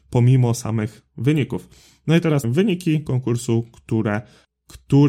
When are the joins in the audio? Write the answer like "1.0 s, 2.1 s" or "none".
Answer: 2.4 s